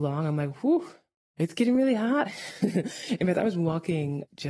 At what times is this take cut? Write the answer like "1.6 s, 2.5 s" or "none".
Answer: none